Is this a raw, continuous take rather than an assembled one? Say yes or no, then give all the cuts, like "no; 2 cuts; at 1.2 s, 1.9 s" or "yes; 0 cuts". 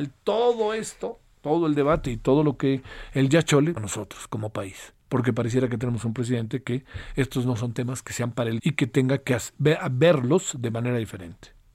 no; 3 cuts; at 3.8 s, 5.0 s, 8.6 s